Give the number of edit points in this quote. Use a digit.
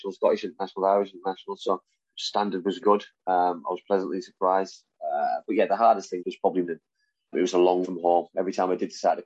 6